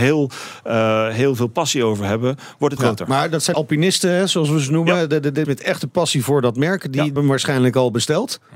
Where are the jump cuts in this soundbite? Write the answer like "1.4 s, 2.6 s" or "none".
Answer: 2.8 s, 3.5 s, 5.4 s, 7.2 s